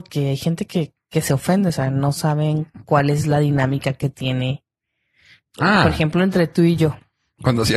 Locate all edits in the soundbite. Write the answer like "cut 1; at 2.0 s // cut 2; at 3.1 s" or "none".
none